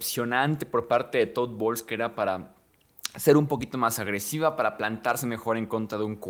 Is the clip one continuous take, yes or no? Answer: yes